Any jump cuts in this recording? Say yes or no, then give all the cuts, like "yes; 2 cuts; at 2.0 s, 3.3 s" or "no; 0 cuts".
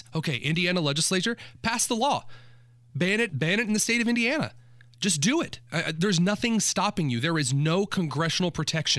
yes; 1 cut; at 3.3 s